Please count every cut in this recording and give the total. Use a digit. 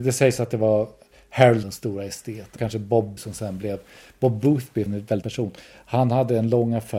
5